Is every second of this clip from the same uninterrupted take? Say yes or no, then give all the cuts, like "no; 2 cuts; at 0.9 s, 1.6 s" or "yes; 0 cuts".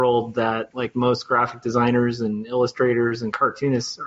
yes; 0 cuts